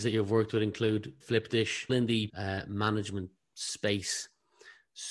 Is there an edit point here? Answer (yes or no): yes